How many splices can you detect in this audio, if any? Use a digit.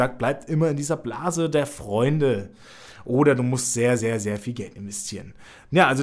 0